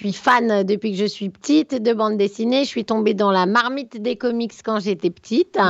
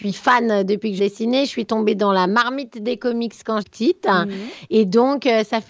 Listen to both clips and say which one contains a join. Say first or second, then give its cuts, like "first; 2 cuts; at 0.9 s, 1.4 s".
second; 2 cuts; at 1.0 s, 3.6 s